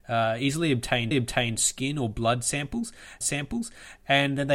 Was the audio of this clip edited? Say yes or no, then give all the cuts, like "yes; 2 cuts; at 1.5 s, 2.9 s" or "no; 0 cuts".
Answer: yes; 2 cuts; at 1.1 s, 3.2 s